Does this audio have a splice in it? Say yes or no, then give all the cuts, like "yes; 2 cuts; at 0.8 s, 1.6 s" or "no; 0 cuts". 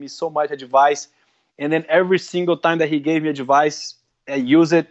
no; 0 cuts